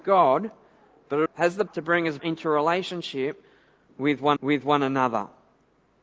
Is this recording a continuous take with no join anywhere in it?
no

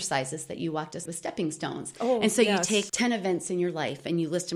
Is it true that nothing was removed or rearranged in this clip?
no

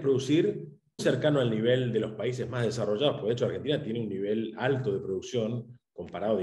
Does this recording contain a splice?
yes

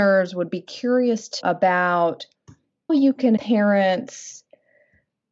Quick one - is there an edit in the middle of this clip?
yes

